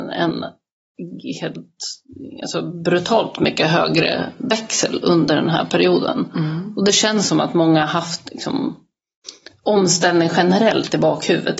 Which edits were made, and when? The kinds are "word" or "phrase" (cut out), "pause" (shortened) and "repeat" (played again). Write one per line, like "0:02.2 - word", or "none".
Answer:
none